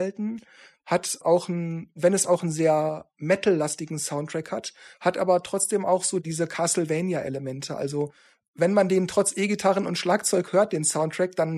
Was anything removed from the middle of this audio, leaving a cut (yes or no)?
no